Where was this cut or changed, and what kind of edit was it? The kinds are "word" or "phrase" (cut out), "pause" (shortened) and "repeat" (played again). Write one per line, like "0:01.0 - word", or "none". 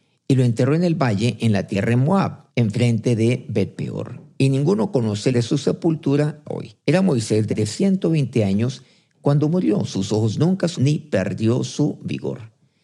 0:02.5 - pause
0:05.3 - word
0:06.4 - word
0:06.8 - pause
0:07.5 - word
0:10.7 - word